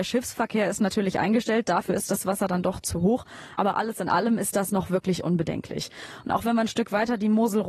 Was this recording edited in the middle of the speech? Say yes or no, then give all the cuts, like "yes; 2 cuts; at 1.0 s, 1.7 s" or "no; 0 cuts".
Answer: no; 0 cuts